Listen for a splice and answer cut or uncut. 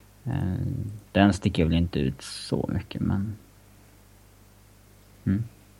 uncut